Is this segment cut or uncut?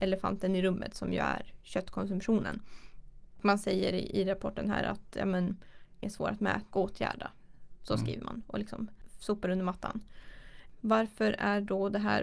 cut